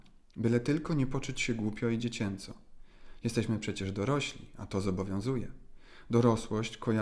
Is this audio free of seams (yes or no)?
yes